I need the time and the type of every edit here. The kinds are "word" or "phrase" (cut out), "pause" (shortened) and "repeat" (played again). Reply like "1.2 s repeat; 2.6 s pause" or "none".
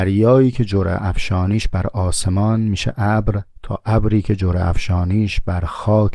3.5 s pause

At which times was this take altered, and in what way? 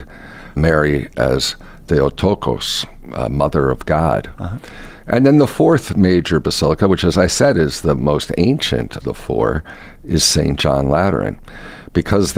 9.0 s word

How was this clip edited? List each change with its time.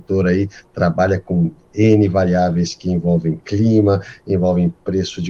none

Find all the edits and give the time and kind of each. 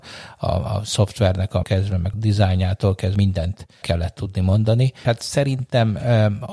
1.6 s word; 2.1 s word; 3.1 s word; 3.8 s word; 5.0 s word

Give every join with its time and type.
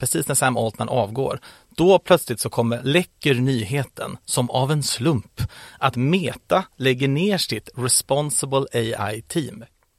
none

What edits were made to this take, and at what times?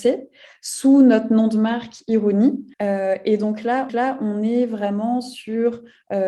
2.7 s pause; 3.9 s repeat

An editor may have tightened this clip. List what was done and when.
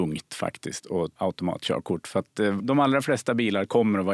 1.2 s word; 2.6 s word

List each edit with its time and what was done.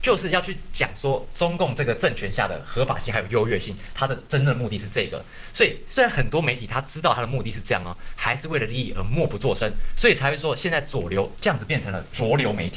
none

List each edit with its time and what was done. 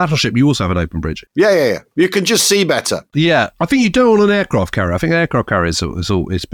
none

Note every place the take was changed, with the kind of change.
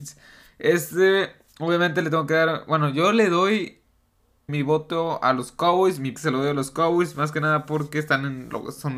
4.5 s word; 6.1 s word

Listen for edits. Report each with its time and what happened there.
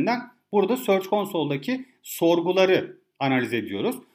none

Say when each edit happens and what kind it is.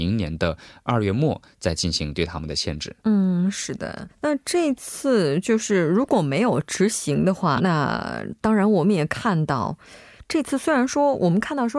3.0 s pause; 4.1 s word; 7.6 s word

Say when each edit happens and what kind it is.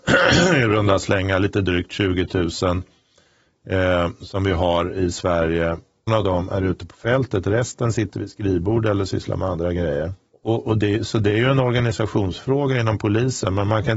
6.1 s word; 10.3 s pause

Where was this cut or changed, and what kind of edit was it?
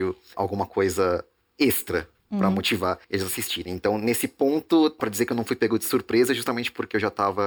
3.0 s pause; 5.0 s word

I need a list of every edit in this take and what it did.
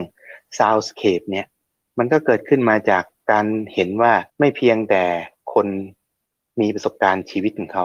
4.3 s pause; 6.3 s pause

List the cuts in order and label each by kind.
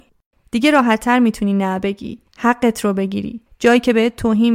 none

